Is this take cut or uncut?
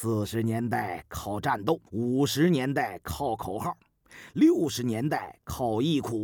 cut